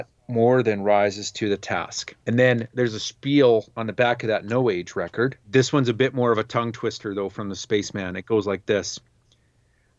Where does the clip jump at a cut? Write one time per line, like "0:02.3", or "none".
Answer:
0:02.2
0:03.7
0:05.4